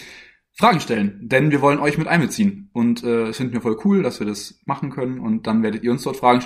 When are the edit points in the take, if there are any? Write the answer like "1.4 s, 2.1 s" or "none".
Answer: none